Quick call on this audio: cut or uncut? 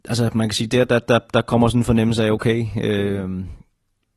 uncut